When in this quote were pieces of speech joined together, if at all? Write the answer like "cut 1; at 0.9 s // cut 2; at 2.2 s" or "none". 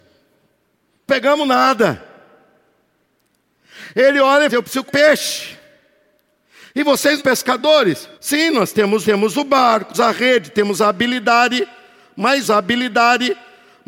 cut 1; at 1.1 s // cut 2; at 4.5 s // cut 3; at 4.9 s // cut 4; at 7.2 s // cut 5; at 8.1 s // cut 6; at 9.0 s // cut 7; at 9.9 s // cut 8; at 12.4 s

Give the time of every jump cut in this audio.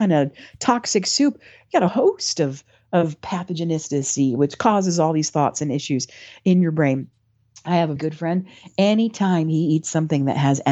cut 1; at 1.9 s // cut 2; at 8.0 s

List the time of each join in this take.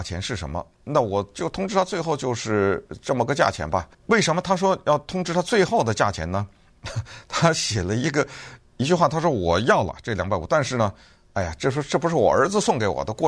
cut 1; at 3.9 s

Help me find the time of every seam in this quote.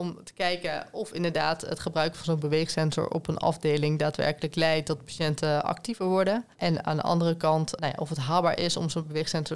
cut 1; at 6.5 s

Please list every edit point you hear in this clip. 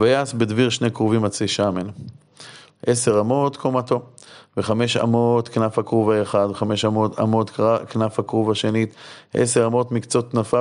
none

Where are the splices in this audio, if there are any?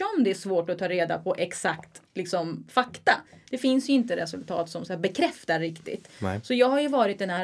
none

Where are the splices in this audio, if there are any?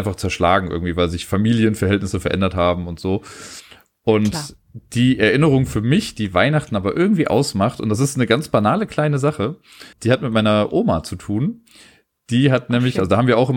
cut 1; at 9.9 s

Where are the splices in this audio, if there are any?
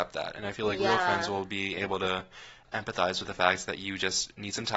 none

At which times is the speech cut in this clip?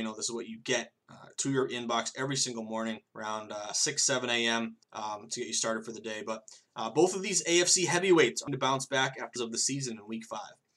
cut 1; at 3.1 s // cut 2; at 4.8 s // cut 3; at 8.5 s // cut 4; at 9.4 s

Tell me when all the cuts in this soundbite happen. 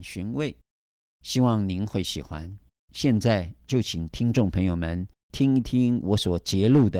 cut 1; at 2.7 s

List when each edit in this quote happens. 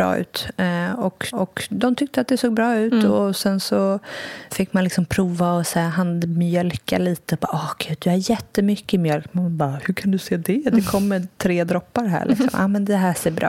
cut 1; at 1.3 s // cut 2; at 4.5 s

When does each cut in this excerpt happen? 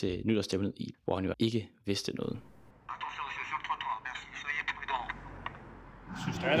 cut 1; at 0.9 s // cut 2; at 1.3 s

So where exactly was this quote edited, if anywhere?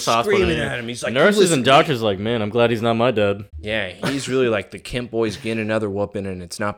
cut 1; at 3.5 s

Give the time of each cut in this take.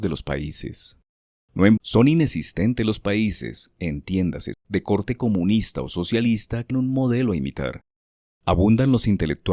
cut 1; at 1.8 s // cut 2; at 4.5 s // cut 3; at 6.7 s

